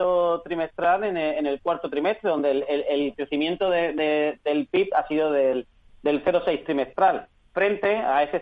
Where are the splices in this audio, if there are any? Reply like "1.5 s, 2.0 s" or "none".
none